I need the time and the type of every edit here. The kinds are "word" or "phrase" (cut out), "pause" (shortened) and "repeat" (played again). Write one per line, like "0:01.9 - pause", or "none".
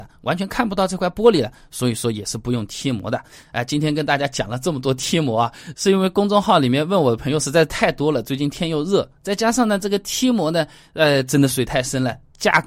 none